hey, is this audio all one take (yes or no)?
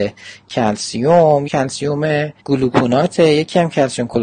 no